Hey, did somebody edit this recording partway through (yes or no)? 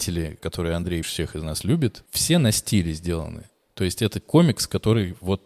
yes